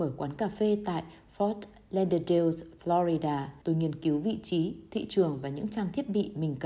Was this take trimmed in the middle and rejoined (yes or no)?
yes